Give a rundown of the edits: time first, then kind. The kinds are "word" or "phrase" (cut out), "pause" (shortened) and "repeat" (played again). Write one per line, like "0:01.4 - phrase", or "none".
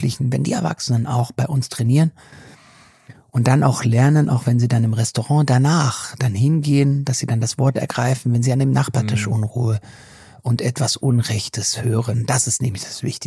none